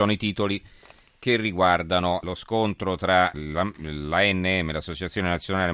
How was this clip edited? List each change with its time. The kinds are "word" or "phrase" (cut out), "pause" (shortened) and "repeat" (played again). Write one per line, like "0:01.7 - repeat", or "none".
0:03.3 - word